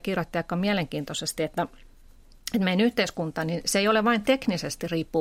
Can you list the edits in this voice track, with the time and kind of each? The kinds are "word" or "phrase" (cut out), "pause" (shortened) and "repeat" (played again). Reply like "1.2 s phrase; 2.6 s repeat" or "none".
none